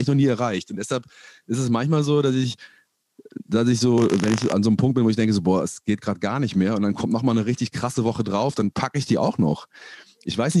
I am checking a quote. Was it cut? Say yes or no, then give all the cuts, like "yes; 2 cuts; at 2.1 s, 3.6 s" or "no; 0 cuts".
no; 0 cuts